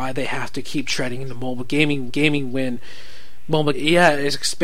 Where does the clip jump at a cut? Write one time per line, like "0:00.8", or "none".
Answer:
0:02.1
0:03.7